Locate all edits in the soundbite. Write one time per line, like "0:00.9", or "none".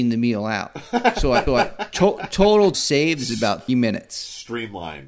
0:01.5
0:02.7
0:03.7